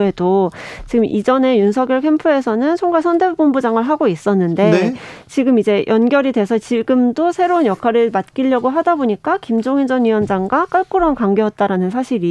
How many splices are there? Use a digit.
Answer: 0